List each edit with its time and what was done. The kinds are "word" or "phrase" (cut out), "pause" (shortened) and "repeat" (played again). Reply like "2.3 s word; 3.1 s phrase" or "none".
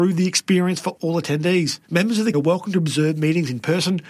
1.8 s pause; 2.3 s word